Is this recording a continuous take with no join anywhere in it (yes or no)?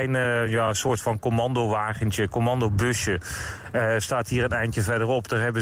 yes